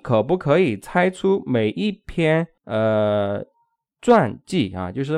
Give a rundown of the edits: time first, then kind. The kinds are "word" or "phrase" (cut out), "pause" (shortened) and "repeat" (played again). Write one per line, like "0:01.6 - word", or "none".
0:02.6 - pause